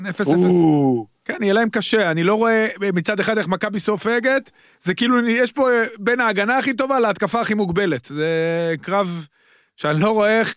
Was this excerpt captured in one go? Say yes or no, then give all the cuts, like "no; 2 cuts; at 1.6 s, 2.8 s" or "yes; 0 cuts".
yes; 0 cuts